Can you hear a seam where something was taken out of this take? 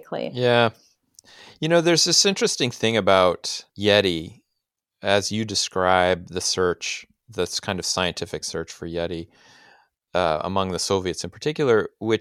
no; 0 cuts

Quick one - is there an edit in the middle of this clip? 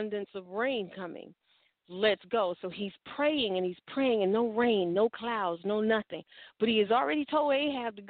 no; 0 cuts

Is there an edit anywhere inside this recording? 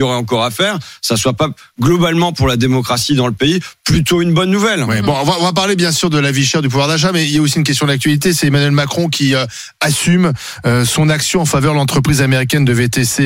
no; 0 cuts

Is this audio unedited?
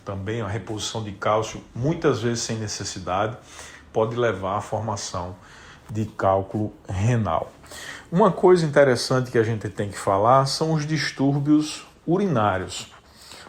yes; 0 cuts

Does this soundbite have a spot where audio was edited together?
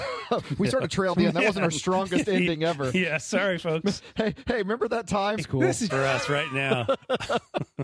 yes; 3 cuts; at 1.1 s, 5.4 s, 5.9 s

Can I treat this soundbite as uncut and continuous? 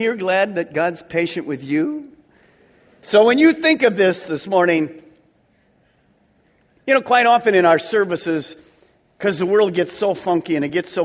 yes; 0 cuts

